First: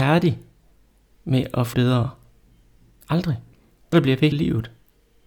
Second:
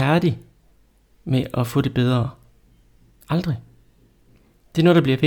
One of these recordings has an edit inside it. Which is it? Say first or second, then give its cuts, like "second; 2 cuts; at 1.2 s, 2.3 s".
first; 4 cuts; at 1.7 s, 3.5 s, 3.9 s, 4.3 s